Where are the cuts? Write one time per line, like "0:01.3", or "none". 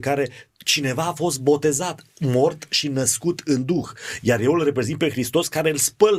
none